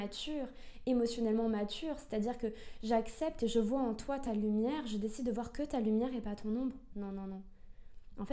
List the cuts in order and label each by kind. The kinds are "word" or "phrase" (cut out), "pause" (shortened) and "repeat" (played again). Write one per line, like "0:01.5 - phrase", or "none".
none